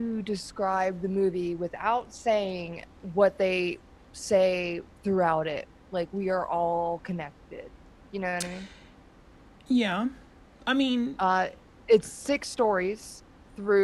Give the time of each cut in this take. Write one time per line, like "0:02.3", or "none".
none